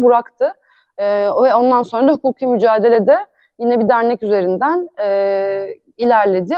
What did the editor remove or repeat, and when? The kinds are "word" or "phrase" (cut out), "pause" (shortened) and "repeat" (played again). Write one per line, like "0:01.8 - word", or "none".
none